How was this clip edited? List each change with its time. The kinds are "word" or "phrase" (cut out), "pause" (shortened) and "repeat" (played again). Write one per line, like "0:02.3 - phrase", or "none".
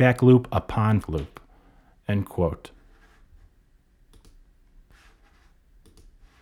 0:01.0 - word